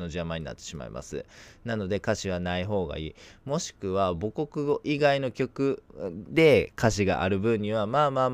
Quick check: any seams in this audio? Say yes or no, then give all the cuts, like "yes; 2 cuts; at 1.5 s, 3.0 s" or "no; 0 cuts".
yes; 1 cut; at 5.9 s